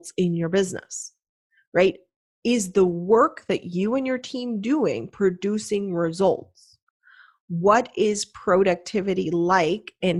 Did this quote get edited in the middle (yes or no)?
no